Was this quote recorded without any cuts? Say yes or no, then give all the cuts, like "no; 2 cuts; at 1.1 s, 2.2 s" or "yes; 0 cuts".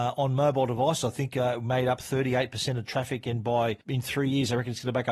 no; 1 cut; at 3.8 s